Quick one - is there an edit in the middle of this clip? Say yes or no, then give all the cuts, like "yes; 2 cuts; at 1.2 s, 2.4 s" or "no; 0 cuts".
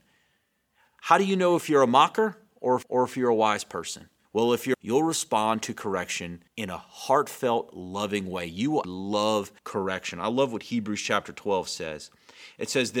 yes; 6 cuts; at 2.8 s, 4.2 s, 4.7 s, 6.5 s, 8.8 s, 9.6 s